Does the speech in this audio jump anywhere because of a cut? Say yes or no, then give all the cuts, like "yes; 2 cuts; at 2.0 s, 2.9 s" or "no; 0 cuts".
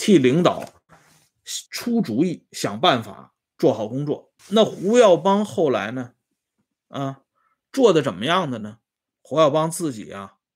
yes; 2 cuts; at 1.7 s, 4.4 s